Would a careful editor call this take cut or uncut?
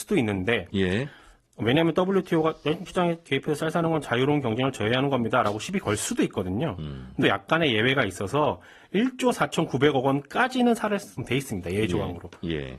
cut